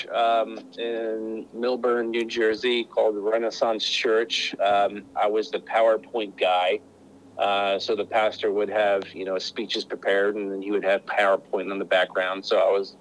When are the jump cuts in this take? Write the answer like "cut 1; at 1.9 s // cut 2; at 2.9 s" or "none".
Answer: none